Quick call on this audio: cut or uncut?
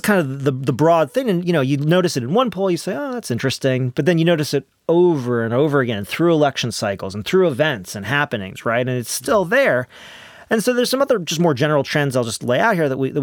uncut